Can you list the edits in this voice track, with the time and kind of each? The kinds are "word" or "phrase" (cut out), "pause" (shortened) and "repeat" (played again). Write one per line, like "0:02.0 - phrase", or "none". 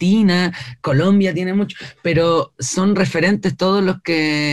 none